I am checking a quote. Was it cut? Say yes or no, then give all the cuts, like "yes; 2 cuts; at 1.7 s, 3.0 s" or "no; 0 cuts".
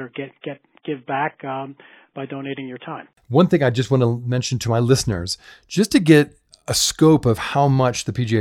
no; 0 cuts